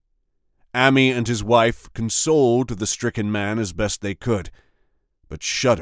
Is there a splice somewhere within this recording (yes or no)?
no